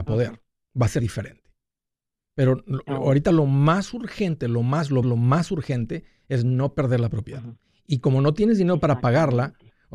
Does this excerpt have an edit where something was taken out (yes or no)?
yes